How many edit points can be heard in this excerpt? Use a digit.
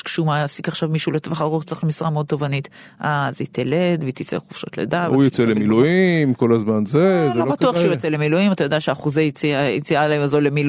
0